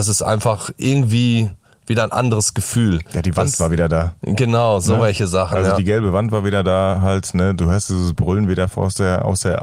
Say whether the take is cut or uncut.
uncut